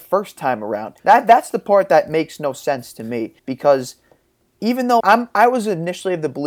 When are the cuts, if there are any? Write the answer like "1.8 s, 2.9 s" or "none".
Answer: 1.0 s, 3.4 s, 5.0 s